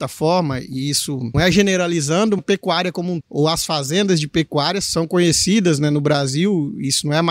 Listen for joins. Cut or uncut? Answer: cut